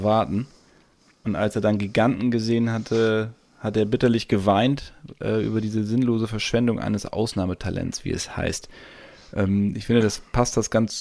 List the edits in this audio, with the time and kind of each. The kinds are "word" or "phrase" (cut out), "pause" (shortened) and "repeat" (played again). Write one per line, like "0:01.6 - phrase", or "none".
none